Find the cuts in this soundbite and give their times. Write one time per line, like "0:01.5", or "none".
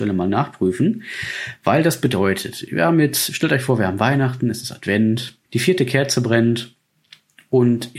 0:05.4